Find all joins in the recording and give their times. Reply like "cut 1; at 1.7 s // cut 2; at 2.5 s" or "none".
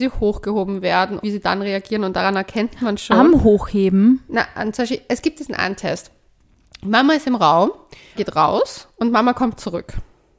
cut 1; at 1.2 s // cut 2; at 8.2 s